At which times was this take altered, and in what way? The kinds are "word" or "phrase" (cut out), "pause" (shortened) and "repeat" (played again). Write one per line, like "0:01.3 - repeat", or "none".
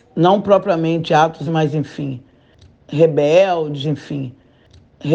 0:01.5 - word
0:03.8 - repeat